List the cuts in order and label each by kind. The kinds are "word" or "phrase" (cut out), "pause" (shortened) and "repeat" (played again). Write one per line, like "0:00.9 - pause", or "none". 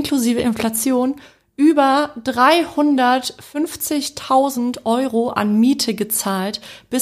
none